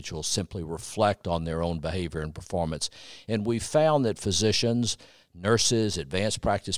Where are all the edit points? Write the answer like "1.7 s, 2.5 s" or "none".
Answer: none